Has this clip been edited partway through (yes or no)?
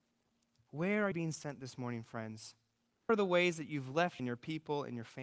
yes